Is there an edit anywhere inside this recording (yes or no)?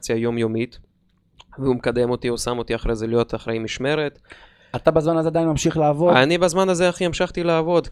no